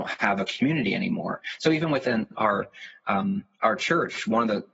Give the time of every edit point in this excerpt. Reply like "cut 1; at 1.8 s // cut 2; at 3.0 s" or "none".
cut 1; at 3.5 s

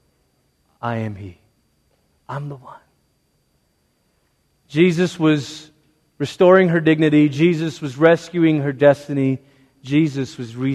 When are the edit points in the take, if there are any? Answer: none

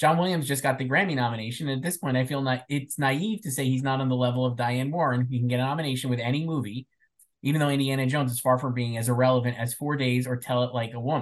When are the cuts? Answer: none

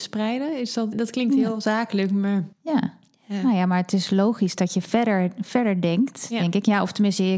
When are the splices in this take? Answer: cut 1; at 0.9 s // cut 2; at 2.5 s

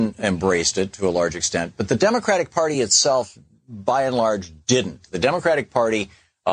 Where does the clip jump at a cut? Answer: none

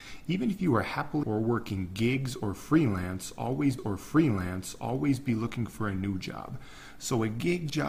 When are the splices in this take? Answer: cut 1; at 1.2 s // cut 2; at 3.8 s

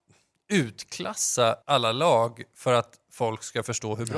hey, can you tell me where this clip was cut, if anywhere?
cut 1; at 1.6 s

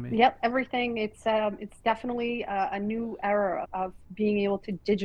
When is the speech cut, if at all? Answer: cut 1; at 3.6 s

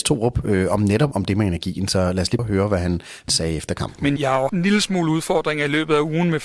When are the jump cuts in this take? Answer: cut 1; at 1.1 s // cut 2; at 2.4 s // cut 3; at 3.3 s // cut 4; at 4.2 s // cut 5; at 4.5 s

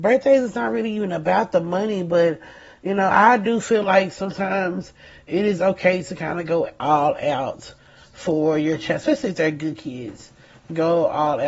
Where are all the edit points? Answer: none

